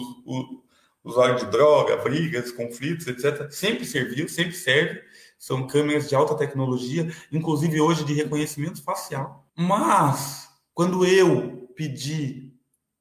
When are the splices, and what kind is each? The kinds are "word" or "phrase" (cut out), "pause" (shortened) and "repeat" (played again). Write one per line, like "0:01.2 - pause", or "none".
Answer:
0:09.5 - pause